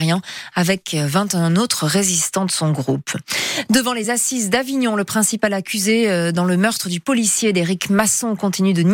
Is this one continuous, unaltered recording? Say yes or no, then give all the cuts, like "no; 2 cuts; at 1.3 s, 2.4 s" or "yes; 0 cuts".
yes; 0 cuts